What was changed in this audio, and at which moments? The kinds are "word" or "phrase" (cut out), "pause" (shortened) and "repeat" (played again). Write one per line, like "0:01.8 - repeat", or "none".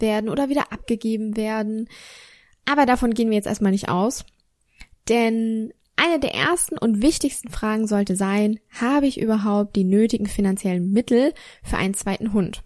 none